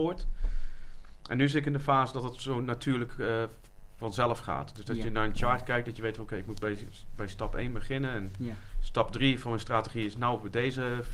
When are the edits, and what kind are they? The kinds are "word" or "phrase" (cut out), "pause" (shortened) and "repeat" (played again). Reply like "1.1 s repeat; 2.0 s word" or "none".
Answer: none